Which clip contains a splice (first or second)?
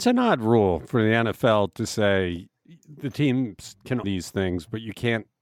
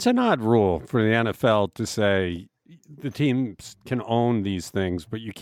first